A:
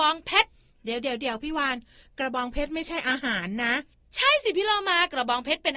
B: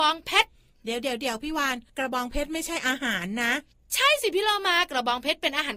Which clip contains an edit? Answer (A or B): B